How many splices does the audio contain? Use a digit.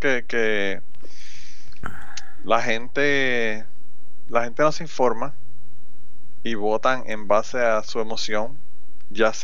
0